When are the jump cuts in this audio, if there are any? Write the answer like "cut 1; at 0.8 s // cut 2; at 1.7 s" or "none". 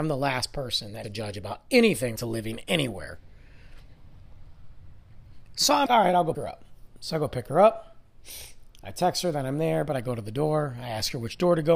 cut 1; at 1.0 s // cut 2; at 2.2 s // cut 3; at 5.9 s // cut 4; at 6.3 s